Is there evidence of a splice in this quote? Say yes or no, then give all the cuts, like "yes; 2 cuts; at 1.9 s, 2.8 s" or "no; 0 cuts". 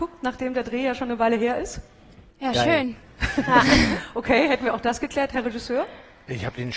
yes; 1 cut; at 2.3 s